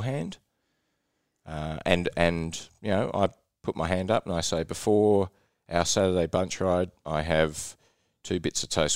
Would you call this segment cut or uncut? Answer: uncut